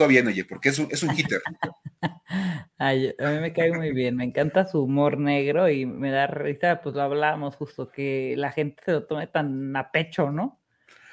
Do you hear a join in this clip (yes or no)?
no